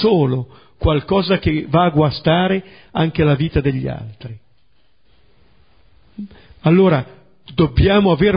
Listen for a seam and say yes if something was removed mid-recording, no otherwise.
no